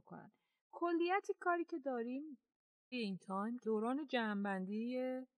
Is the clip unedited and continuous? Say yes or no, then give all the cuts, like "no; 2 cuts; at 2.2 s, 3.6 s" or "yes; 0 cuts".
no; 2 cuts; at 2.9 s, 3.6 s